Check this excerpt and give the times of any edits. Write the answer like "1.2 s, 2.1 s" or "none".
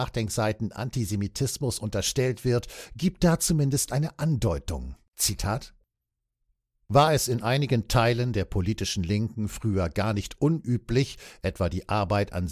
none